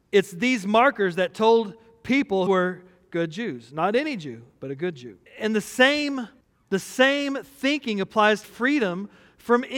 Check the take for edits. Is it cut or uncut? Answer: cut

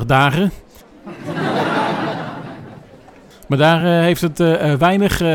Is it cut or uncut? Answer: uncut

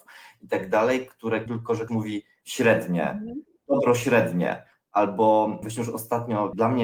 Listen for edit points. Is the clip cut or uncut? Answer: cut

